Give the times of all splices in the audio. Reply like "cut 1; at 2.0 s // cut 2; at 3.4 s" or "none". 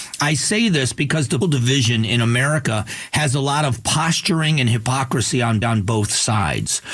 cut 1; at 1.4 s // cut 2; at 5.6 s